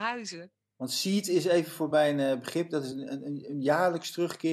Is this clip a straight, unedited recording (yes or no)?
yes